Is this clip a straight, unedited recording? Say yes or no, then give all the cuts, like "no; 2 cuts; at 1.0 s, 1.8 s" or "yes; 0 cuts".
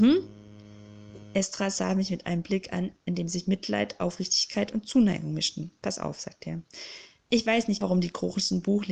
no; 1 cut; at 7.8 s